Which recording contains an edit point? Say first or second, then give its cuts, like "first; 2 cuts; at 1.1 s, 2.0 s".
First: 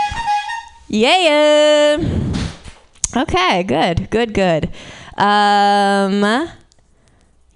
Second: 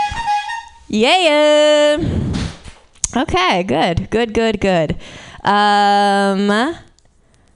first; 1 cut; at 4.3 s